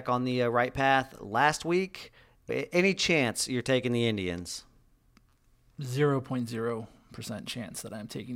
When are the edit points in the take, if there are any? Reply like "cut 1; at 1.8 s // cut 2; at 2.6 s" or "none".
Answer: cut 1; at 2.5 s

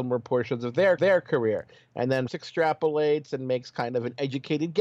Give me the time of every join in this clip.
cut 1; at 1.0 s // cut 2; at 2.3 s

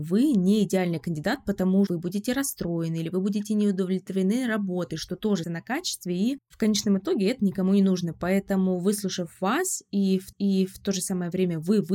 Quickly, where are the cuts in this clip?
cut 1; at 1.9 s // cut 2; at 5.4 s // cut 3; at 10.3 s

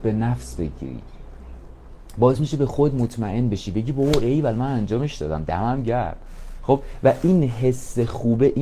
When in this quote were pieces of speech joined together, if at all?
none

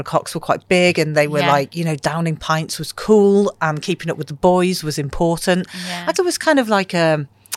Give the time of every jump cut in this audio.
cut 1; at 6.1 s

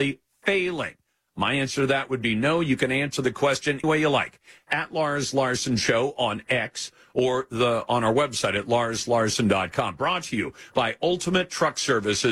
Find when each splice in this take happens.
cut 1; at 3.8 s

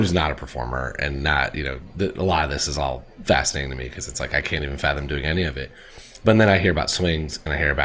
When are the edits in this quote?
none

